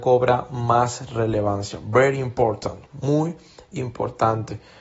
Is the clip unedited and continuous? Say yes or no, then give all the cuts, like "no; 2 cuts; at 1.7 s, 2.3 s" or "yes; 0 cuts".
yes; 0 cuts